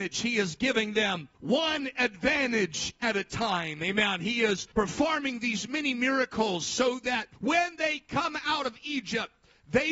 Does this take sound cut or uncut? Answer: cut